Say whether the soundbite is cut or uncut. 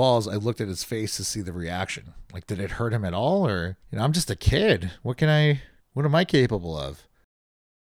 cut